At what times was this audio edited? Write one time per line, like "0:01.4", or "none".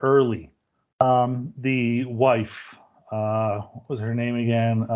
none